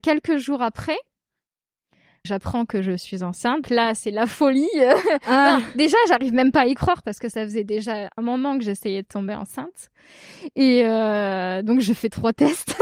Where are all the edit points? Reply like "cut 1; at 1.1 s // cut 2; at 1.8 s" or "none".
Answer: cut 1; at 2.2 s // cut 2; at 3.6 s // cut 3; at 8.2 s